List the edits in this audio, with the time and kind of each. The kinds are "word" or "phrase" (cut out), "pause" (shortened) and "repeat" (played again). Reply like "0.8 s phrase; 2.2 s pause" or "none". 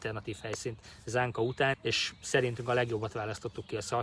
1.7 s word